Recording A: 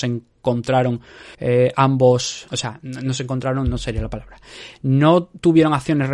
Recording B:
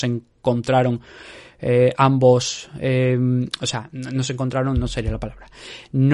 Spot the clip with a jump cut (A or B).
A